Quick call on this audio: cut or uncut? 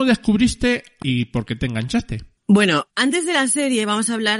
cut